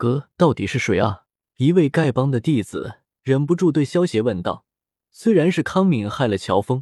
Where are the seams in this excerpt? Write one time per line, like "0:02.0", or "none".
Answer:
0:01.4
0:03.1
0:04.7